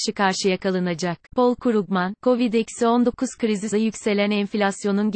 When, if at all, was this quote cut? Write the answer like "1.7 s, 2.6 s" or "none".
1.3 s, 3.7 s